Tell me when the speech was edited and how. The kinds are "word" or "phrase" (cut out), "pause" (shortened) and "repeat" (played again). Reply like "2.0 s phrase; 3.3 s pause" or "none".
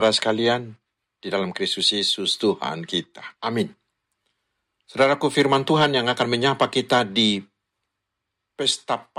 3.3 s pause